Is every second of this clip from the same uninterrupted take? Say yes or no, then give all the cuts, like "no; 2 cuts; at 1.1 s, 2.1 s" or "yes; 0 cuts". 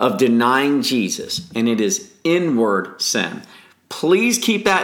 yes; 0 cuts